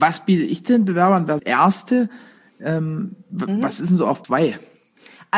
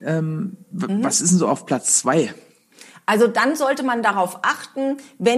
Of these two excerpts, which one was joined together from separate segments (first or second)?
first